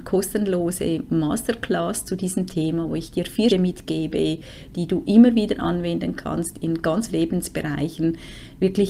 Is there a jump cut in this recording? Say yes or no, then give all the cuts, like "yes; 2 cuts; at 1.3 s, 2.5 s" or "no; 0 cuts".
yes; 2 cuts; at 3.5 s, 7.1 s